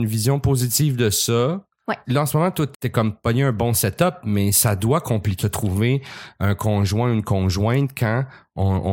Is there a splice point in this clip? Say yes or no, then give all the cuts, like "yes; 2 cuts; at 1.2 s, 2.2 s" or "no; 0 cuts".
yes; 2 cuts; at 2.7 s, 5.4 s